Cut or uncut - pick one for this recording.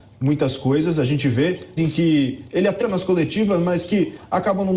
cut